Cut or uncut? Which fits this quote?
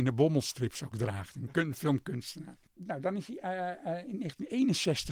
uncut